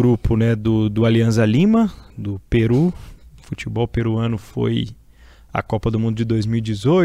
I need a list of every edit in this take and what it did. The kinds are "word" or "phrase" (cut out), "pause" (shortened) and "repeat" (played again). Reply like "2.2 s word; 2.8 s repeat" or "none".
2.1 s word